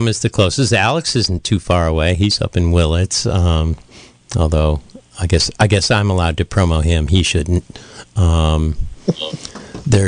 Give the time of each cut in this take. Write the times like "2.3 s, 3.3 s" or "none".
none